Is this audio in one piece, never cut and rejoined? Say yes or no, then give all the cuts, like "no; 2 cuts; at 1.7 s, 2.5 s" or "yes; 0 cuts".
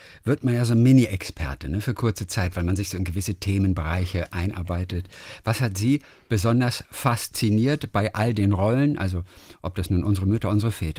yes; 0 cuts